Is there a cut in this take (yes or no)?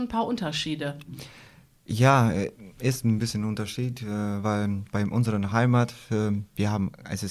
no